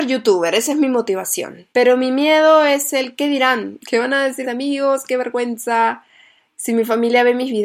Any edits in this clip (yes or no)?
yes